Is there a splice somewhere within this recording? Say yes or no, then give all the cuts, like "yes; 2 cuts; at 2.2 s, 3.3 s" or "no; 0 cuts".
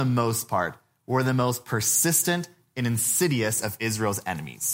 no; 0 cuts